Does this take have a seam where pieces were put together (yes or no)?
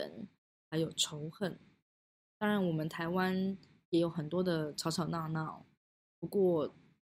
no